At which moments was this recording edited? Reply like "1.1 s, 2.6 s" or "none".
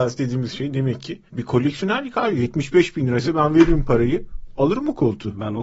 1.3 s

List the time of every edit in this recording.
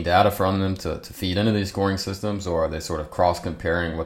none

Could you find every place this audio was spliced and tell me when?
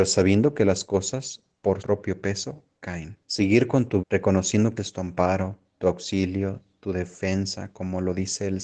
1.8 s, 3.2 s, 4.0 s, 4.8 s, 5.7 s

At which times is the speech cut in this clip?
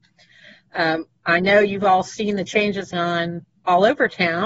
2.9 s

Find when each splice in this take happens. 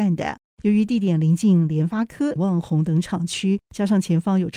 2.4 s

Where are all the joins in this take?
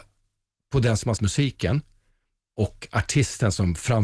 1.2 s

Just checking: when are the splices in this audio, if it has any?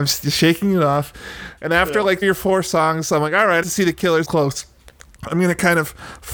2.2 s, 3.6 s, 4.2 s

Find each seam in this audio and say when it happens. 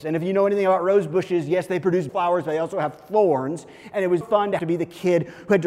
2.1 s, 4.2 s, 4.6 s

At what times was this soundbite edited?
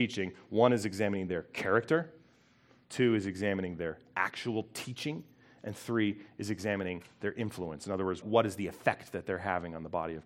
8.2 s

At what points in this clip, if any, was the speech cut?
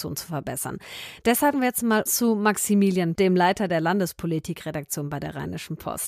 1.5 s, 2.1 s, 3.1 s

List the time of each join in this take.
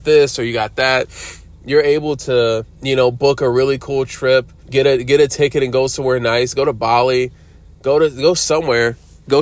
2.7 s, 4.6 s

